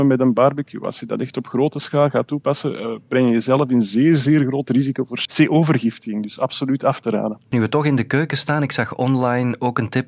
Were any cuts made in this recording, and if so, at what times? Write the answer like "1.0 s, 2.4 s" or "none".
none